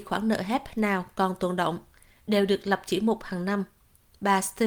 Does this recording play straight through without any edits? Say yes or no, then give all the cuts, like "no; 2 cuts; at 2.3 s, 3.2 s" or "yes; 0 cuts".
yes; 0 cuts